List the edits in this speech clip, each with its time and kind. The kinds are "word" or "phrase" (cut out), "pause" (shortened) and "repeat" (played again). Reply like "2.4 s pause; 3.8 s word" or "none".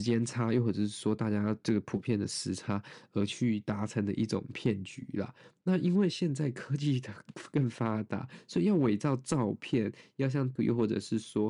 10.6 s word